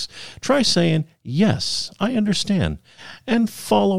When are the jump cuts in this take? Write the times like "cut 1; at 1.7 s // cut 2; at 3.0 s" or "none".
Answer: none